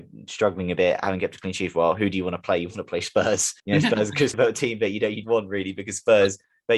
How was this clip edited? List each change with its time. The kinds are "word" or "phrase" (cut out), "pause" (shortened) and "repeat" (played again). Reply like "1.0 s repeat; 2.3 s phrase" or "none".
3.6 s pause; 4.3 s word; 5.2 s word